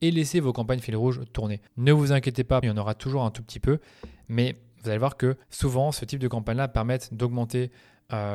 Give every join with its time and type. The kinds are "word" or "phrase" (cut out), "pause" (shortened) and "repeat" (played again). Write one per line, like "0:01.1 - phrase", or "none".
0:01.7 - pause
0:02.6 - phrase
0:05.4 - pause

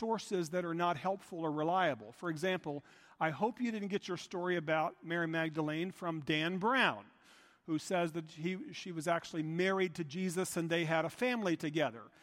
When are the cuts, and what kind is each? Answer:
none

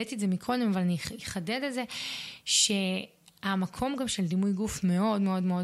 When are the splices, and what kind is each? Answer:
none

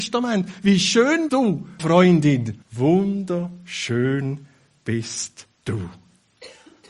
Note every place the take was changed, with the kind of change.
0:01.3 - word
0:01.8 - word
0:02.6 - pause
0:05.5 - pause

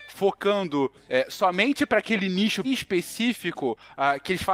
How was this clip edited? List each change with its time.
0:02.6 - word

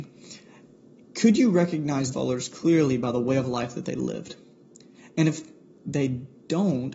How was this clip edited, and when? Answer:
0:02.1 - word

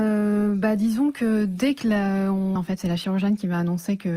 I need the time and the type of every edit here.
0:02.6 - phrase

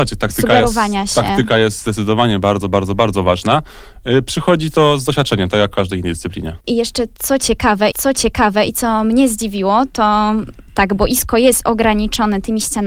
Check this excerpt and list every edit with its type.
0:06.6 - pause
0:07.9 - repeat
0:10.7 - pause

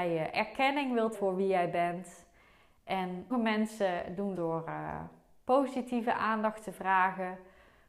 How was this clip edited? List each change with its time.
0:01.1 - word
0:03.3 - word
0:04.4 - word

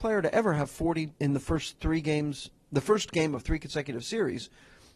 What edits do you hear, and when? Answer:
0:01.1 - pause

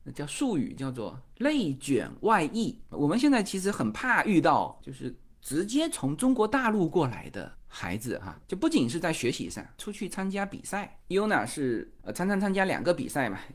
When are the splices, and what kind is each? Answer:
0:08.4 - word

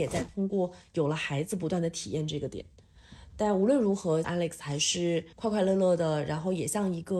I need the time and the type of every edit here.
0:04.2 - phrase
0:05.3 - pause

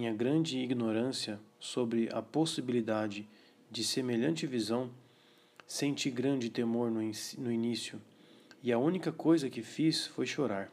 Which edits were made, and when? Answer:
none

